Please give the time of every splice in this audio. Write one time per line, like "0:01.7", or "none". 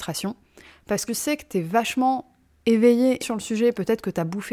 0:01.1
0:03.2